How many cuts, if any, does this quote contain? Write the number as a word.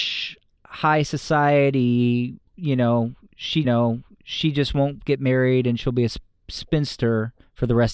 one